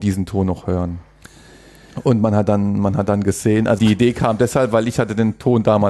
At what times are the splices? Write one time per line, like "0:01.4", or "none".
0:03.8